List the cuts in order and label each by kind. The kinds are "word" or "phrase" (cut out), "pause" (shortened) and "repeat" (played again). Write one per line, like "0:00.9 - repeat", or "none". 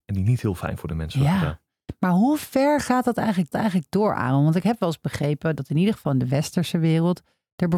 0:03.5 - repeat